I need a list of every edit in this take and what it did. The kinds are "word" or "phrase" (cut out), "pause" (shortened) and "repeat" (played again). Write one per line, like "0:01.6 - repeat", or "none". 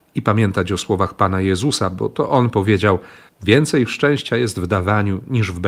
none